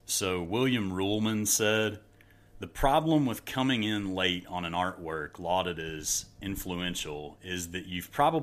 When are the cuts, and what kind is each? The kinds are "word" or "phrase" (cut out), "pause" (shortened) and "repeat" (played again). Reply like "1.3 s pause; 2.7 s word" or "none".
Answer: none